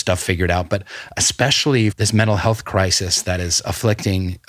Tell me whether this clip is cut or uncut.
cut